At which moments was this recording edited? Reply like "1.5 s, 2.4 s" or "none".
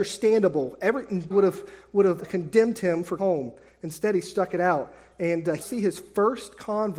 1.3 s, 2.2 s, 3.2 s, 5.6 s